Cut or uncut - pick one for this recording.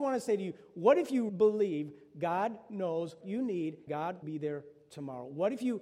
cut